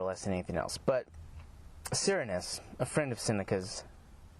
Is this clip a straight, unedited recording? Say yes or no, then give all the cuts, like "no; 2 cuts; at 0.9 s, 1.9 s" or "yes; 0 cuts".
yes; 0 cuts